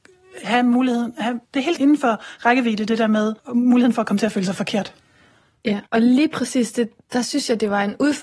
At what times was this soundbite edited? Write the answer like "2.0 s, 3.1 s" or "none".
1.4 s, 1.8 s, 3.4 s, 5.9 s, 7.0 s